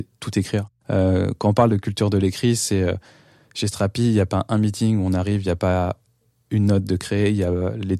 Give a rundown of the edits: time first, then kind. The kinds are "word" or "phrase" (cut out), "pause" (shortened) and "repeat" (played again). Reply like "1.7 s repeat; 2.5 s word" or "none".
none